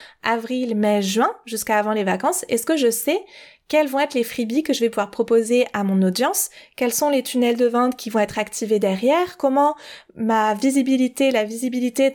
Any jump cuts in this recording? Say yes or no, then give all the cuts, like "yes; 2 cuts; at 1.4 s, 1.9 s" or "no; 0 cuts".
no; 0 cuts